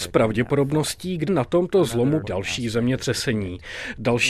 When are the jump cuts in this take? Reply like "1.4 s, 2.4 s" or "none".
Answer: 1.3 s, 2.2 s